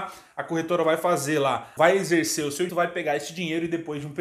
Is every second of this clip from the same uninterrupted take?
no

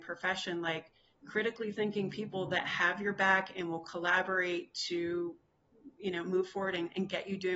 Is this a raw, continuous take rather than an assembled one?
yes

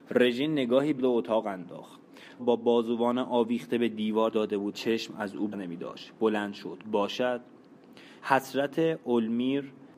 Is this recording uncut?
no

